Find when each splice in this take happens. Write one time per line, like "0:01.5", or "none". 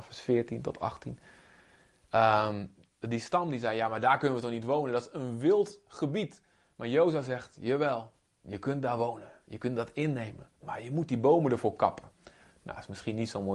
0:10.5